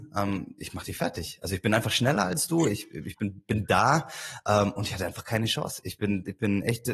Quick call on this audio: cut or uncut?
uncut